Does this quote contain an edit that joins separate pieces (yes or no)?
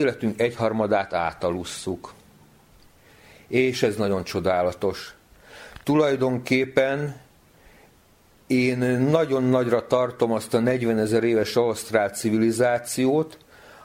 no